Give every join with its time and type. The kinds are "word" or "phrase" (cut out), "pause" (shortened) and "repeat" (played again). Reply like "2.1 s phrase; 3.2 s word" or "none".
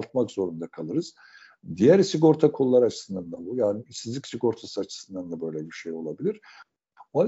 none